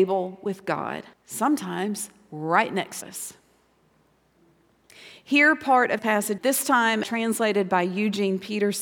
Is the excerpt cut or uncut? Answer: cut